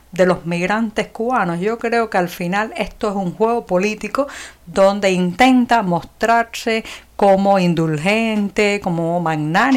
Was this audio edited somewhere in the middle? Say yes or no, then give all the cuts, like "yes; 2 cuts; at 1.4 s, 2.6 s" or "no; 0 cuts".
no; 0 cuts